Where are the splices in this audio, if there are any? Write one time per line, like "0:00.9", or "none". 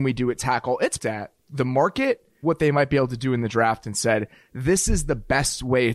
0:01.0
0:01.4
0:02.4